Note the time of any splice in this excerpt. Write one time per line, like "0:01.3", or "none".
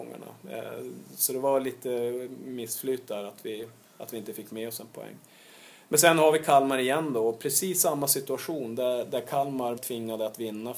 0:09.8